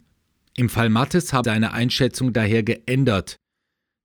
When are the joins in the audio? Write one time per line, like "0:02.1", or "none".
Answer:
0:01.4

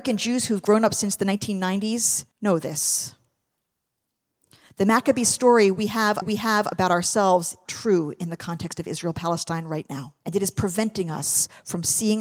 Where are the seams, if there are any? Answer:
0:02.3
0:06.2
0:07.6
0:10.2

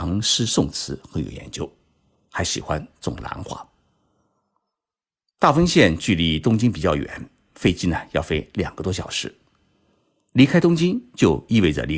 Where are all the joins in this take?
none

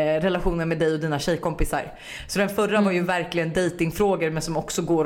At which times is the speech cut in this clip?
none

